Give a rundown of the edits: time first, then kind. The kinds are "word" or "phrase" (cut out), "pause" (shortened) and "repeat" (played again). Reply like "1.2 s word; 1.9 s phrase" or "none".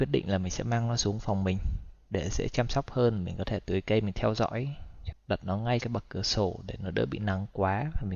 5.1 s word; 5.8 s word